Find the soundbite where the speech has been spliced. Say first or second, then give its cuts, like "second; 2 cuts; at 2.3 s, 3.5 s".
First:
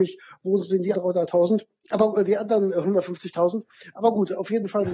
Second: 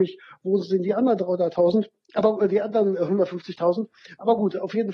first; 1 cut; at 0.9 s